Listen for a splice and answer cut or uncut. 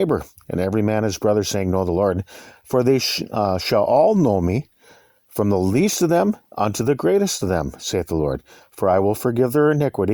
uncut